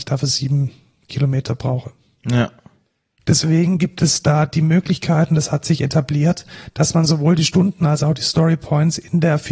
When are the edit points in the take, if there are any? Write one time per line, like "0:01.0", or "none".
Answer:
none